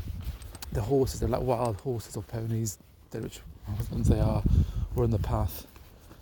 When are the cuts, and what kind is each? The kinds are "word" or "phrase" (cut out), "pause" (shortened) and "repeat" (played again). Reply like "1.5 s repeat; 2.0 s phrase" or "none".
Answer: none